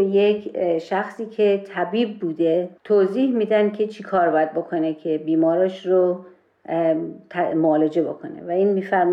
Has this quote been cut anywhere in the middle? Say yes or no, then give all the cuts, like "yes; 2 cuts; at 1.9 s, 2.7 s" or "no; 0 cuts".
yes; 1 cut; at 2.8 s